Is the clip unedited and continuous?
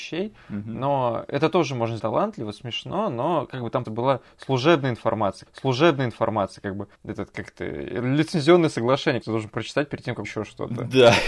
no; 6 cuts; at 2.0 s, 3.8 s, 5.5 s, 6.9 s, 9.2 s, 10.2 s

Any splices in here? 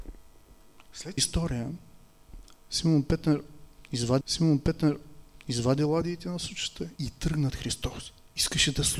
yes; 4 cuts; at 1.2 s, 4.2 s, 7.0 s, 7.5 s

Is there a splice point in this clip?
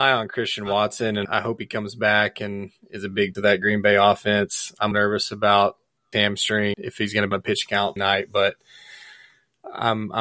yes; 7 cuts; at 1.2 s, 3.3 s, 4.9 s, 6.1 s, 6.7 s, 7.3 s, 8.0 s

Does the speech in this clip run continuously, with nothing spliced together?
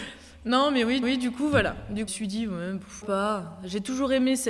no; 3 cuts; at 1.0 s, 2.1 s, 3.0 s

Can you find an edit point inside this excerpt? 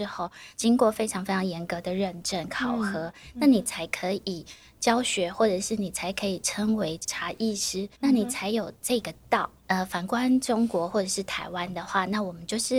yes; 1 cut; at 7.9 s

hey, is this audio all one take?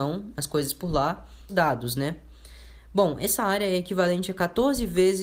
no; 1 cut; at 1.5 s

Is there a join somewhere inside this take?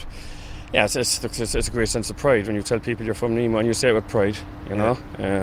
no; 0 cuts

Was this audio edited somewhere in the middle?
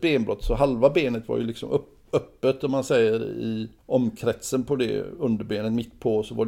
yes; 1 cut; at 3.8 s

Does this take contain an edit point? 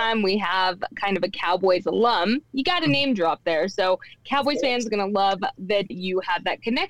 yes; 1 cut; at 5.9 s

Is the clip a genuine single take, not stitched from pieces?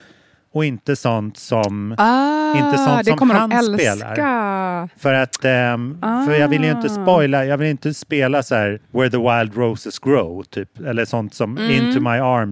no; 1 cut; at 8.8 s

